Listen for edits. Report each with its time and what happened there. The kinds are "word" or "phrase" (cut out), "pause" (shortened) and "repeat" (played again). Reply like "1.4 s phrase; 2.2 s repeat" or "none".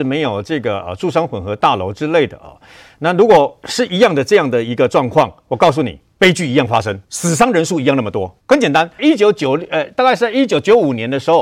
7.0 s pause; 8.4 s pause; 9.0 s phrase